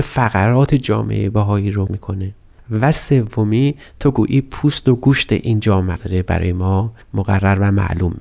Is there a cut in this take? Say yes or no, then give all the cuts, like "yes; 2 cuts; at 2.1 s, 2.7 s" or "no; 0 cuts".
yes; 3 cuts; at 1.9 s, 6.0 s, 7.0 s